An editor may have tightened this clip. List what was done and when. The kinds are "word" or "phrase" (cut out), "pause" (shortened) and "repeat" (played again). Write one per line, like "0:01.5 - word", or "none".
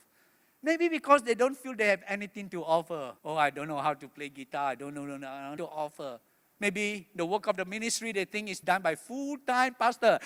0:03.2 - pause
0:05.6 - phrase
0:06.3 - pause
0:08.6 - word